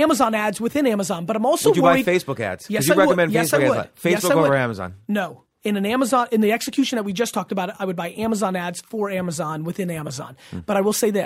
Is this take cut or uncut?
uncut